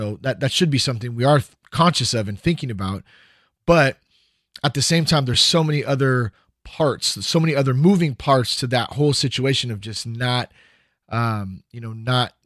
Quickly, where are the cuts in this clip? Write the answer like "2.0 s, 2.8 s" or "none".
none